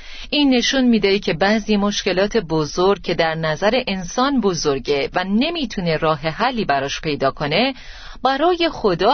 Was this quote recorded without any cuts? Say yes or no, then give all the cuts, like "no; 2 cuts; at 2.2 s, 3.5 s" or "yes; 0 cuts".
yes; 0 cuts